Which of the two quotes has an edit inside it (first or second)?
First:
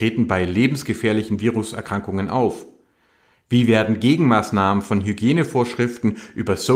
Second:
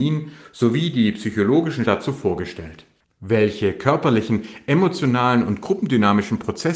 second